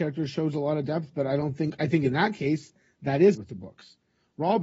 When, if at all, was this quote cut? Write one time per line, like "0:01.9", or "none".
0:03.3

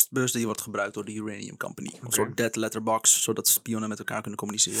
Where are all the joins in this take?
none

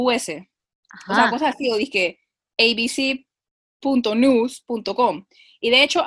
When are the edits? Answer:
none

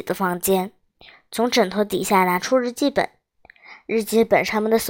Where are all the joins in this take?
none

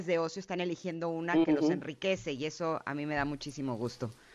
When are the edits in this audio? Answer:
none

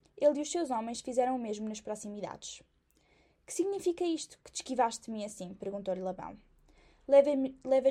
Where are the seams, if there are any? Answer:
none

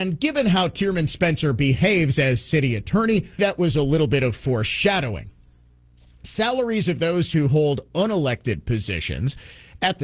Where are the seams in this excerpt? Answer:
0:03.4

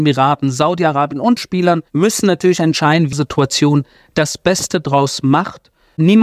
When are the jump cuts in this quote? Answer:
0:01.4
0:01.9
0:03.1

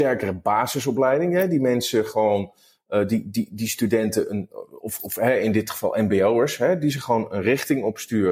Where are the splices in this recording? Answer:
none

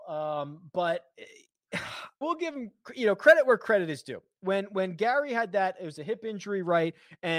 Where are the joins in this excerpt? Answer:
0:02.2

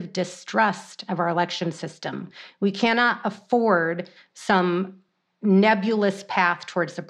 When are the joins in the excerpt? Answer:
none

